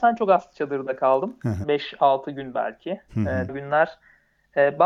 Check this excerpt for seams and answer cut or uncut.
cut